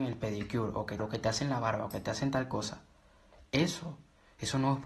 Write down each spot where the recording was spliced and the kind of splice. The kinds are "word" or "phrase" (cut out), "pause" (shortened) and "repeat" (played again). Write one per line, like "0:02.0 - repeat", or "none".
0:01.0 - word